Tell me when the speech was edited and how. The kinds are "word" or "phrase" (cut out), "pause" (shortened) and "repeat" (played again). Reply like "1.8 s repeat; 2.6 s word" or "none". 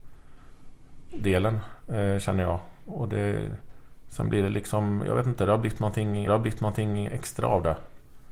1.1 s word; 6.3 s repeat